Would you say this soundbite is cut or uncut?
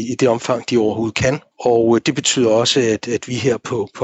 uncut